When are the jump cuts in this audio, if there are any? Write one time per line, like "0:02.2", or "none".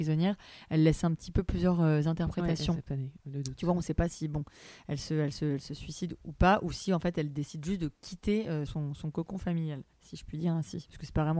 0:08.7